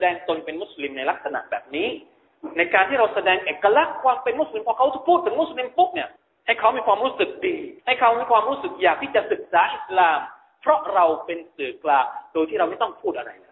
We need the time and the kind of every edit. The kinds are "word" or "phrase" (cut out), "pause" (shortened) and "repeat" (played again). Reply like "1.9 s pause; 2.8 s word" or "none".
6.2 s pause; 7.8 s pause